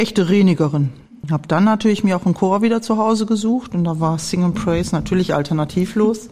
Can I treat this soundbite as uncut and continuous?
yes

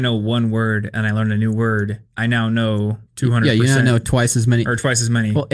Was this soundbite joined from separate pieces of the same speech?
yes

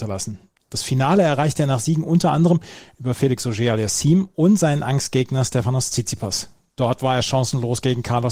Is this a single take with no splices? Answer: yes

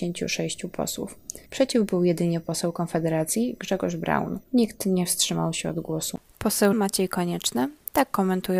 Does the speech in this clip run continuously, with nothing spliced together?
no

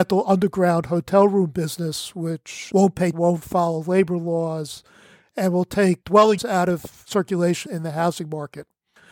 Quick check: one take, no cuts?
no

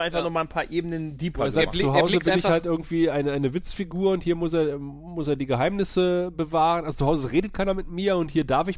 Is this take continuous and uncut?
yes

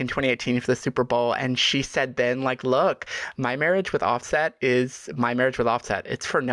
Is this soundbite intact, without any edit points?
yes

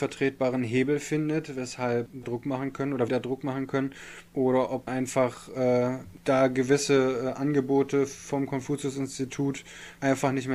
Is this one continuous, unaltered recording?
no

